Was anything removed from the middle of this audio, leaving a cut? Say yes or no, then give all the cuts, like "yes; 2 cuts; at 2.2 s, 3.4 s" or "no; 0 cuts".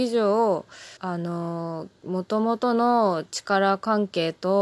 yes; 1 cut; at 1.0 s